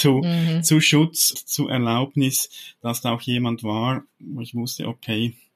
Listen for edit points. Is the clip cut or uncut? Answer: cut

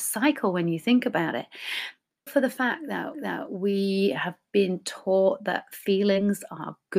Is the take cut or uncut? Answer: cut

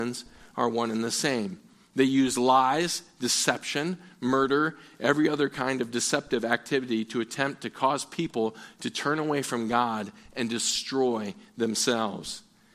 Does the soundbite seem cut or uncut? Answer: uncut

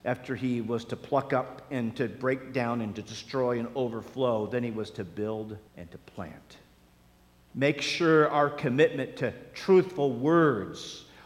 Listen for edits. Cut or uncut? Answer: cut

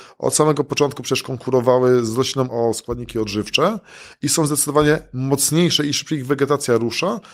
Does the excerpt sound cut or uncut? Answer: cut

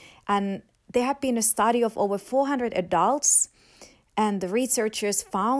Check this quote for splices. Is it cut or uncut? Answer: uncut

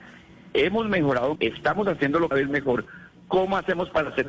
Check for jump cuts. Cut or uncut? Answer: cut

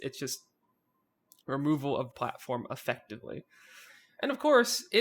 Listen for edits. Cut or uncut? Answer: cut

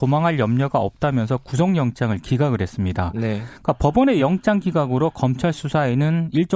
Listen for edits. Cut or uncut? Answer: uncut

